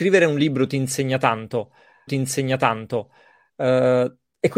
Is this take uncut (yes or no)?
no